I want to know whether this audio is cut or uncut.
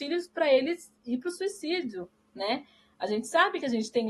uncut